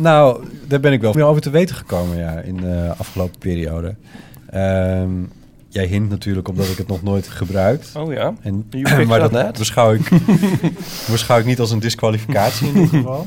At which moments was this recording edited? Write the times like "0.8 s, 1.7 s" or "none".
1.1 s, 5.5 s, 7.3 s, 9.3 s